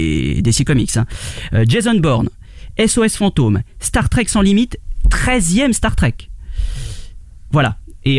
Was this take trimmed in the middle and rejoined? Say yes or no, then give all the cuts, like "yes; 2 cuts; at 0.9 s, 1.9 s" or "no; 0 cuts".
no; 0 cuts